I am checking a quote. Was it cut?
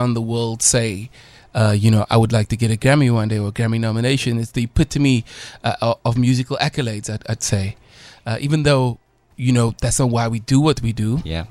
no; 0 cuts

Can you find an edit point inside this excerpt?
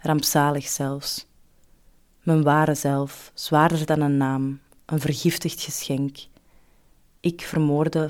no; 0 cuts

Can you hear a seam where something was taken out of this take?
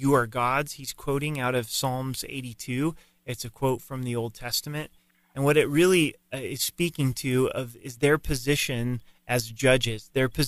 no; 0 cuts

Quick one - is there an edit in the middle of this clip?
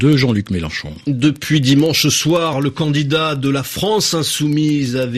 no; 0 cuts

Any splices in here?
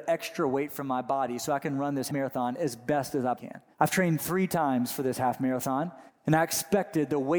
yes; 4 cuts; at 2.1 s, 3.3 s, 3.7 s, 6.1 s

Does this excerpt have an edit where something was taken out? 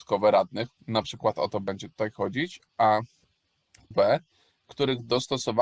yes; 1 cut; at 3.9 s

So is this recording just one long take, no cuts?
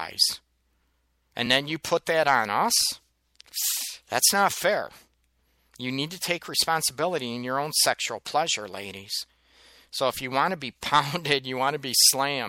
yes; 0 cuts

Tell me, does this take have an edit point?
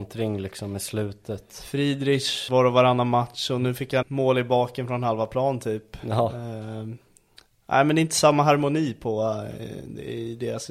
yes; 2 cuts; at 2.5 s, 4.0 s

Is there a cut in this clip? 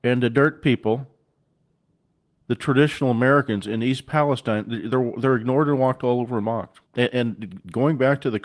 yes; 2 cuts; at 2.2 s, 6.9 s

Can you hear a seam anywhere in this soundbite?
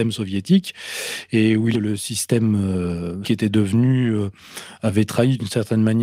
yes; 2 cuts; at 1.7 s, 3.2 s

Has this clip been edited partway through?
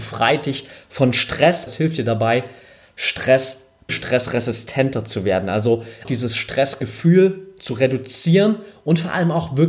yes; 3 cuts; at 1.7 s, 3.9 s, 6.0 s

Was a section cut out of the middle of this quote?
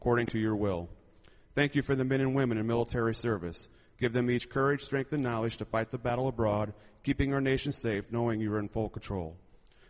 no; 0 cuts

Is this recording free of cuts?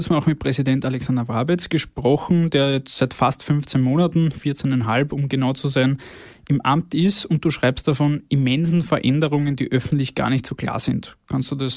yes; 0 cuts

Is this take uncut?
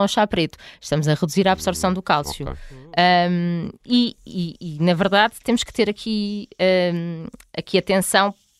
yes; 0 cuts

